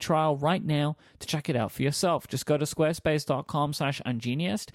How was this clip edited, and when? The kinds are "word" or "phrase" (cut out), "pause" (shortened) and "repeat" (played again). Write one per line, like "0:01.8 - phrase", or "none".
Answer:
none

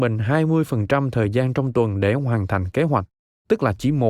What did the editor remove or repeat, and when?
none

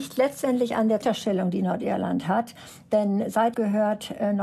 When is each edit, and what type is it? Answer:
0:01.0 - word
0:03.5 - phrase

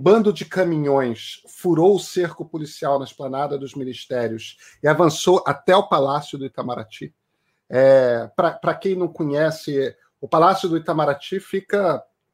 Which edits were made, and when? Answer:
none

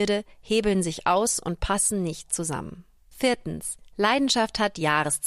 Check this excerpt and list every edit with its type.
none

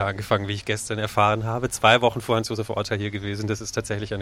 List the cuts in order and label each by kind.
none

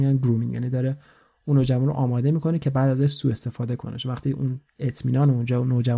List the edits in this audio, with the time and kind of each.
none

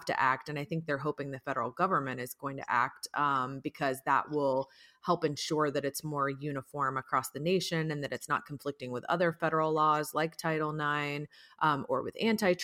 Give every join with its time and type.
none

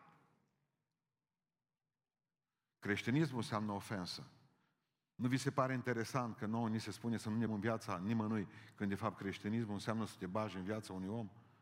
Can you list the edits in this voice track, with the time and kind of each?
0:07.5 - word

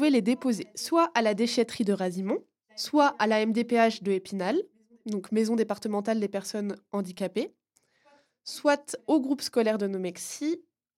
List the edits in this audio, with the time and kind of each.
none

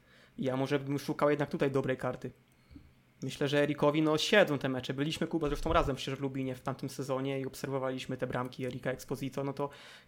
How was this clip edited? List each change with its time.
none

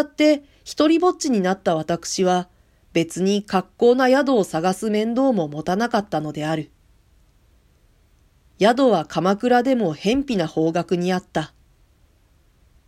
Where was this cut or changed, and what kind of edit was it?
none

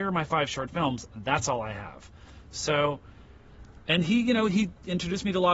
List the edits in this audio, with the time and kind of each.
none

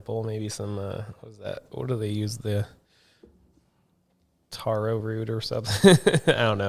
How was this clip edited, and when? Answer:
none

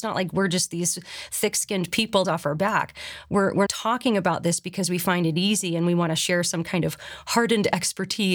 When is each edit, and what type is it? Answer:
0:02.2 - phrase
0:03.7 - word

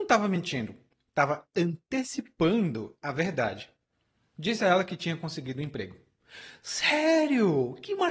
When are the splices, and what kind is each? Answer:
none

